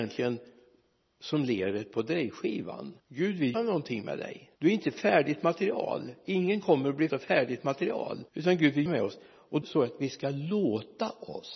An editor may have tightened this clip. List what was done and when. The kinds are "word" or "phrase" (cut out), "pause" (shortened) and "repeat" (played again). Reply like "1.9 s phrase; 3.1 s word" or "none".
3.0 s pause; 3.5 s word; 4.6 s pause; 7.1 s word; 8.3 s pause; 8.9 s word; 9.6 s word